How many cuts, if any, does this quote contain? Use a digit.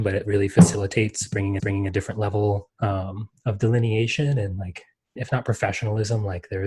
3